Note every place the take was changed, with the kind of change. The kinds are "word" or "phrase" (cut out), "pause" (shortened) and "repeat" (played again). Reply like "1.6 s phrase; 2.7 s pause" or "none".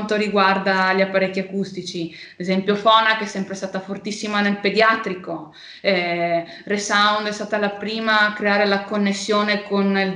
none